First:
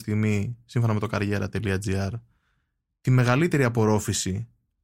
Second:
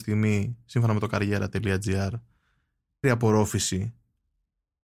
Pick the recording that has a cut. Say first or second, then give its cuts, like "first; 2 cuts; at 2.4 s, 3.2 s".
second; 1 cut; at 3.0 s